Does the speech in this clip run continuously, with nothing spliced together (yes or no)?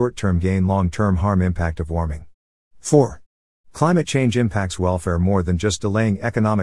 yes